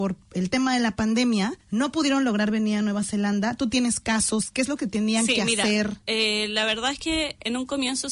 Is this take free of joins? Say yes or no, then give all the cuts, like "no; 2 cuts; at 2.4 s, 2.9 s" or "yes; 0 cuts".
no; 1 cut; at 1.6 s